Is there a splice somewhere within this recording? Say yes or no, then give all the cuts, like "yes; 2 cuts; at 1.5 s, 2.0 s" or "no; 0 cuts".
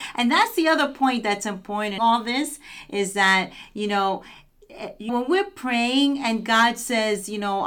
yes; 2 cuts; at 2.0 s, 5.1 s